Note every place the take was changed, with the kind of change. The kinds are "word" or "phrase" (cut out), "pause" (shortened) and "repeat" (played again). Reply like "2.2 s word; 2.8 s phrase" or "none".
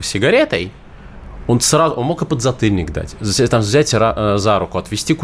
none